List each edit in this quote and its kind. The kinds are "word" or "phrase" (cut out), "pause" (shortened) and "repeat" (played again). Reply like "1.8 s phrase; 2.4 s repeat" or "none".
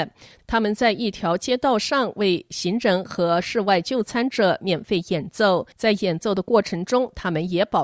5.7 s pause